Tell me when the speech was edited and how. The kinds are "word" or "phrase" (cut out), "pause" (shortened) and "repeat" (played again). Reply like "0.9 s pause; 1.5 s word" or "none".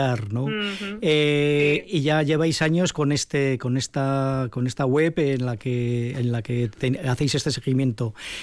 none